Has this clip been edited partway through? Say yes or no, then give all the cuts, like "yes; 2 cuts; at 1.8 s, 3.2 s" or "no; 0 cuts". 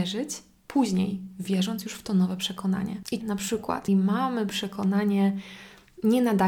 yes; 2 cuts; at 3.2 s, 3.9 s